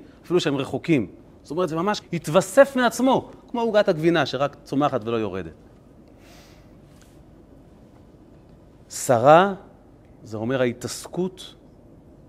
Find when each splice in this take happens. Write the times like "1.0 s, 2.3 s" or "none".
2.0 s